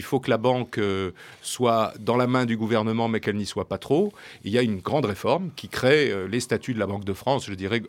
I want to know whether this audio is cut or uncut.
uncut